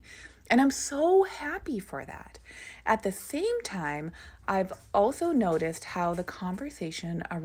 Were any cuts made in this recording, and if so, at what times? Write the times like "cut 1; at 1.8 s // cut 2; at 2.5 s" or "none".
none